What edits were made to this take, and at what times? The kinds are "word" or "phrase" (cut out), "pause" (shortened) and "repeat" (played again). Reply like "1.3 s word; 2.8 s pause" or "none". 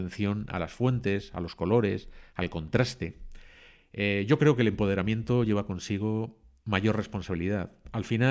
none